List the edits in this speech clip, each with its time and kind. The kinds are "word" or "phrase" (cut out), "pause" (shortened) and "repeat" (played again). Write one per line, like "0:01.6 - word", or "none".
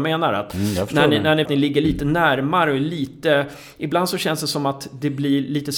0:01.5 - phrase